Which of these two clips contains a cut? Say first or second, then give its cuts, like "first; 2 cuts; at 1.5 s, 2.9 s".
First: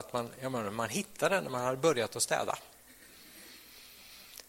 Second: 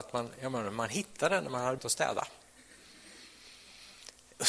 second; 1 cut; at 1.8 s